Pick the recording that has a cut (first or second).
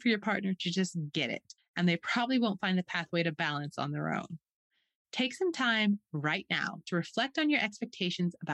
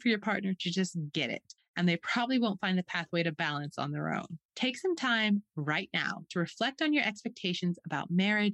second